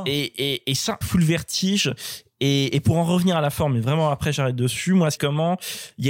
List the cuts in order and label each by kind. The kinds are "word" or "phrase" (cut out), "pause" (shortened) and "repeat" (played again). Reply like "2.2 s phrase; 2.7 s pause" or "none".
1.0 s phrase; 5.2 s phrase